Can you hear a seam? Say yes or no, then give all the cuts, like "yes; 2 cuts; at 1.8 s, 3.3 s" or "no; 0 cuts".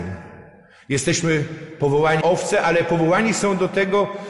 yes; 1 cut; at 2.2 s